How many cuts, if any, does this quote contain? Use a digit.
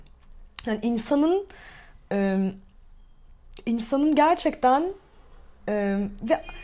0